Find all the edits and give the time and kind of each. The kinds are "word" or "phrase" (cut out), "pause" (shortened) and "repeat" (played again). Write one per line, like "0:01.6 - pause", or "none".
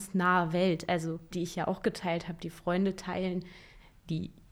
0:01.3 - word